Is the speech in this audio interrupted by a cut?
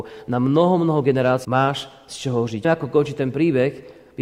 yes; 2 cuts; at 1.4 s, 2.6 s

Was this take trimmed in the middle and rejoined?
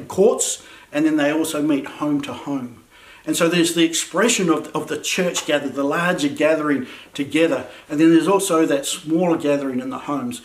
no; 0 cuts

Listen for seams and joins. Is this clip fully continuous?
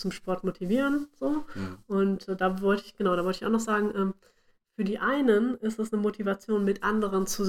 yes; 0 cuts

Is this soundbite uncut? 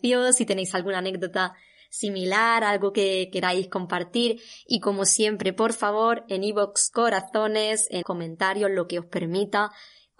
no; 1 cut; at 8.0 s

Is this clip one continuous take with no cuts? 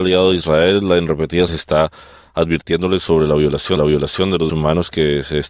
no; 3 cuts; at 1.5 s, 3.8 s, 4.5 s

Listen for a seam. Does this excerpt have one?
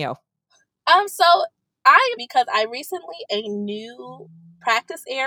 yes; 2 cuts; at 2.2 s, 3.3 s

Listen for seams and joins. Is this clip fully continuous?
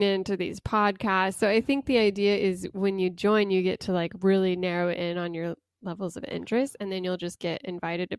yes; 0 cuts

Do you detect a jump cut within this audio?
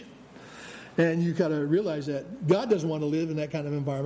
no; 0 cuts

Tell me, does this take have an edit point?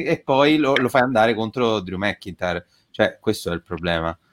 no; 0 cuts

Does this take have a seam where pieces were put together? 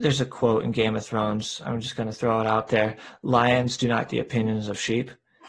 yes; 1 cut; at 4.1 s

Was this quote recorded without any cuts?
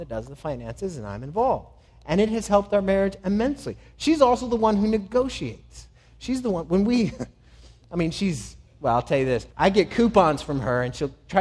no; 1 cut; at 9.5 s

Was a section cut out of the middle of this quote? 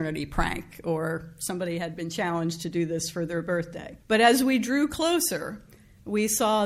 yes; 1 cut; at 4.0 s

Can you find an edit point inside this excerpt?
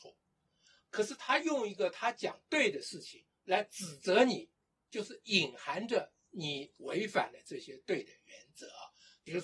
no; 0 cuts

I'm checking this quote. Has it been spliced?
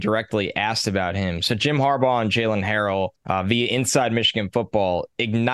yes; 1 cut; at 3.2 s

